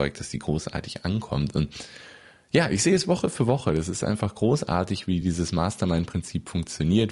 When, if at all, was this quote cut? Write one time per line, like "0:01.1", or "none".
none